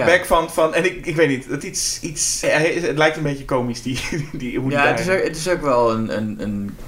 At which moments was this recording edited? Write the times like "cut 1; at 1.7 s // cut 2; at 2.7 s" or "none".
cut 1; at 1.6 s // cut 2; at 2.4 s